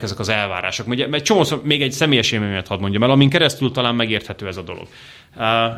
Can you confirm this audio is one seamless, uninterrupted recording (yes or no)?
yes